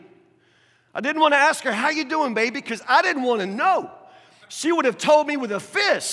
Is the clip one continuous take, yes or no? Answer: yes